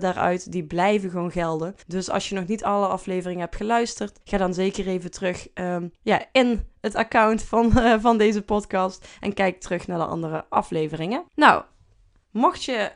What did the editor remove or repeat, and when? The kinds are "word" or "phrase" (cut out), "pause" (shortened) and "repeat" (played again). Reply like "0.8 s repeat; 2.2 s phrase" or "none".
1.8 s pause; 4.2 s pause; 5.9 s pause; 11.3 s pause